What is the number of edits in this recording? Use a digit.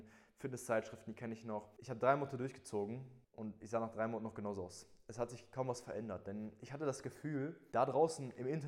1